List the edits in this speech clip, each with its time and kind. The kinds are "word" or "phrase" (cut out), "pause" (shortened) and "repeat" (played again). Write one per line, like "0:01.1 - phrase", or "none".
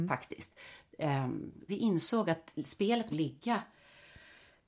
0:01.7 - word
0:03.1 - phrase

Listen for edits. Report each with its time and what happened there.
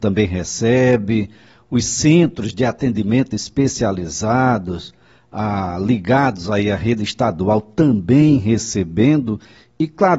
none

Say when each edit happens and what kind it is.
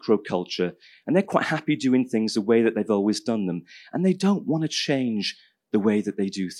none

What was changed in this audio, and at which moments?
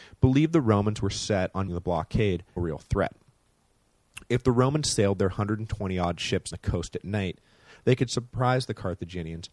0:01.7 - word
0:02.6 - phrase
0:06.5 - word

